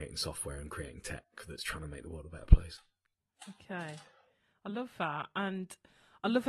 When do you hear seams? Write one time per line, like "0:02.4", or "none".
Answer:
none